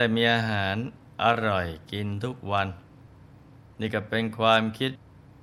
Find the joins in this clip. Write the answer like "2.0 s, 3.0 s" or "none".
none